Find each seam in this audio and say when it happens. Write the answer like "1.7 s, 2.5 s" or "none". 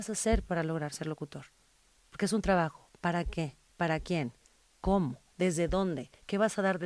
none